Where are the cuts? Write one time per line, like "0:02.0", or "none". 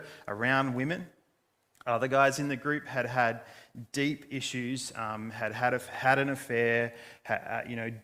none